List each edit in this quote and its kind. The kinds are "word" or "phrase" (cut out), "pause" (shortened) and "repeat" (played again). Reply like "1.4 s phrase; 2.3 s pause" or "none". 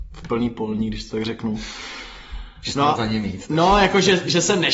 3.0 s word